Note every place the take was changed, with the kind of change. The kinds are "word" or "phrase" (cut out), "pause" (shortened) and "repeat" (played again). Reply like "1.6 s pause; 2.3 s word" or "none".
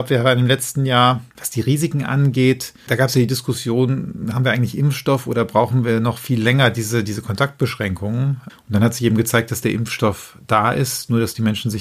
1.3 s pause